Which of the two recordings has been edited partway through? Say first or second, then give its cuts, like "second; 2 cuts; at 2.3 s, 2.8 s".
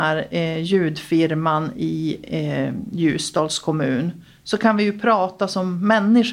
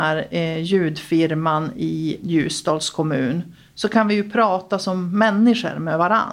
second; 1 cut; at 2.2 s